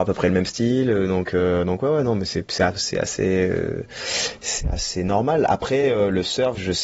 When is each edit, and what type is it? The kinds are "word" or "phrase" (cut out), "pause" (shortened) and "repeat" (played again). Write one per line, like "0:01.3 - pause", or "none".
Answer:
none